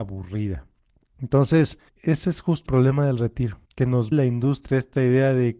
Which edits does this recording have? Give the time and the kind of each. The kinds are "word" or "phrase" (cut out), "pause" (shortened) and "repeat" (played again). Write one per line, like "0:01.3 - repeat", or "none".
0:01.9 - pause
0:02.7 - word
0:03.6 - pause
0:04.1 - word